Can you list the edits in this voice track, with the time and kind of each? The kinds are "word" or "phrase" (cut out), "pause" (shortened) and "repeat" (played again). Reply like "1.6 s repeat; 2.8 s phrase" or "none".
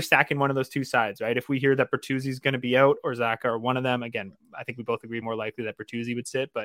5.2 s word

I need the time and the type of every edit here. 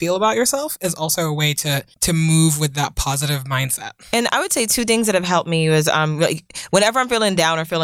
1.9 s pause

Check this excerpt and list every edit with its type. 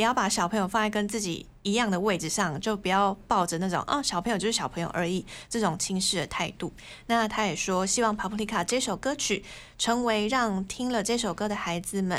none

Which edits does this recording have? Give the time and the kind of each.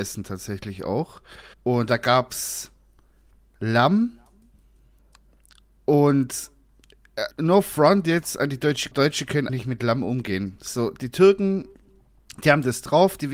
1.5 s pause; 7.3 s word; 8.9 s phrase; 9.5 s word

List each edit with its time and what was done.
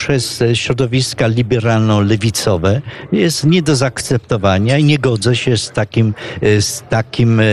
none

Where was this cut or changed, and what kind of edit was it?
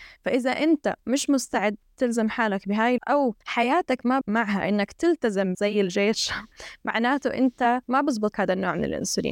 3.0 s word; 3.4 s pause; 4.2 s word; 5.5 s phrase; 7.8 s pause; 8.3 s word

